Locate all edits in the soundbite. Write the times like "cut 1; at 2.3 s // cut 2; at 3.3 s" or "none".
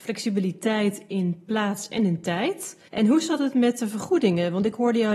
cut 1; at 2.9 s